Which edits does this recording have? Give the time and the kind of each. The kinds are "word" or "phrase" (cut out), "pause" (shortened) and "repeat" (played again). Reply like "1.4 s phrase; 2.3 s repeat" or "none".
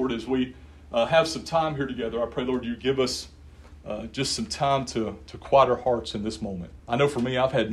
6.8 s pause